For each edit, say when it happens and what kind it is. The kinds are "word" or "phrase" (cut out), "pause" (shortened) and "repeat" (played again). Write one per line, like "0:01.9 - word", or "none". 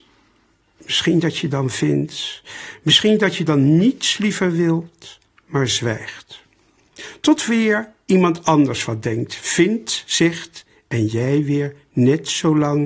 none

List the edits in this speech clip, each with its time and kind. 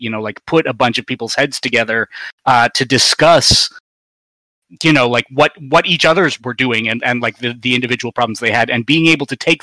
none

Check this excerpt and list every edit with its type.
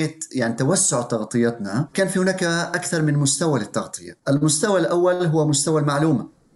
0:04.2 - pause

